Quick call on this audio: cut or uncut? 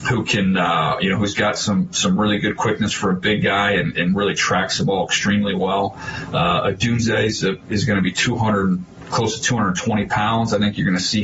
uncut